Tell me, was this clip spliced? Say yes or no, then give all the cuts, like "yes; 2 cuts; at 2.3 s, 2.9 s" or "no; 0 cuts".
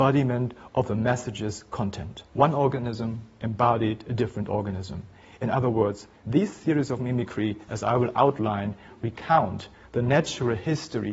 yes; 1 cut; at 2.3 s